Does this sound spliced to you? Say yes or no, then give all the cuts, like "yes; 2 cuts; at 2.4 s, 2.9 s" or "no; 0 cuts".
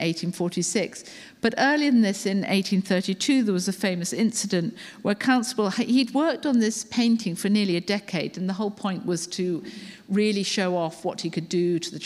no; 0 cuts